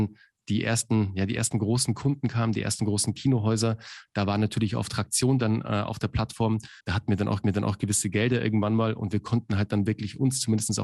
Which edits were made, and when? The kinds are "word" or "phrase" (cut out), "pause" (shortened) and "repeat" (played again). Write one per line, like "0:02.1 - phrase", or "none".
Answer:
0:06.8 - pause
0:07.4 - repeat

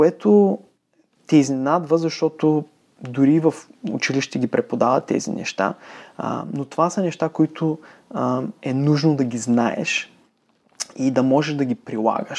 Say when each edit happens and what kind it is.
none

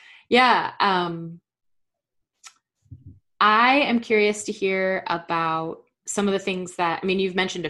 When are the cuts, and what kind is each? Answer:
none

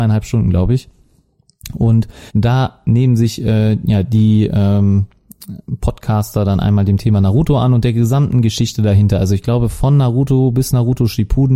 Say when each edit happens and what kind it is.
0:02.3 - pause

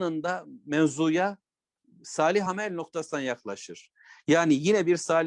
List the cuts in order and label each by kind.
none

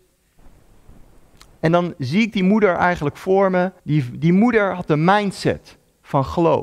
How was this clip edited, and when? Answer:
0:03.8 - pause

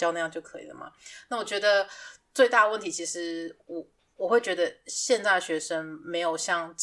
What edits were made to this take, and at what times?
none

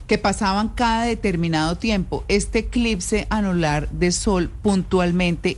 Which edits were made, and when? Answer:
none

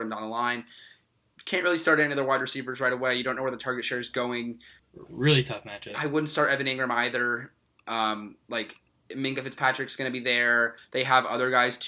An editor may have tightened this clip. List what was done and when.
0:04.8 - pause
0:08.4 - pause

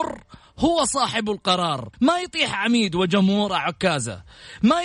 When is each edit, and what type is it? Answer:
0:01.9 - pause

